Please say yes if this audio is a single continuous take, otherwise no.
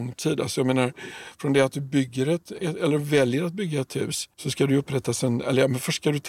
no